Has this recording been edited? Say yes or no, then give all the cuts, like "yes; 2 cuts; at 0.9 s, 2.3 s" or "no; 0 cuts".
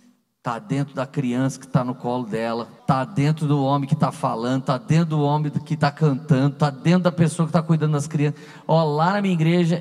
yes; 1 cut; at 2.8 s